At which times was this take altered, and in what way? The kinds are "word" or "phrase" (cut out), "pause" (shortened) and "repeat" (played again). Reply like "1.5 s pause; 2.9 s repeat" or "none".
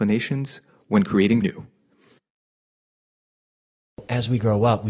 1.4 s word